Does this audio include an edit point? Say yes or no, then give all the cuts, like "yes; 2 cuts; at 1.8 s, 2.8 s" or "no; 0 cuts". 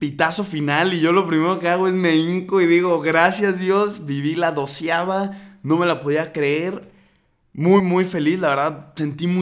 yes; 1 cut; at 7.8 s